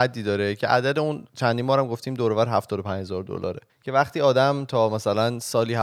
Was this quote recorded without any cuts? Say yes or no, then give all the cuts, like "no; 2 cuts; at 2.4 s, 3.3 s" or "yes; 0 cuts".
no; 2 cuts; at 1.3 s, 3.7 s